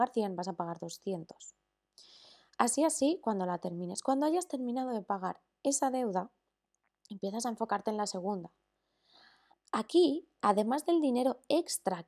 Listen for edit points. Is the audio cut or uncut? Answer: uncut